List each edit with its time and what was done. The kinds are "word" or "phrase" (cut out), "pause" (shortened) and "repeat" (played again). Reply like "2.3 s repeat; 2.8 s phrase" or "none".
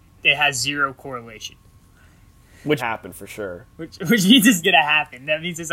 2.8 s phrase; 3.7 s pause; 4.6 s word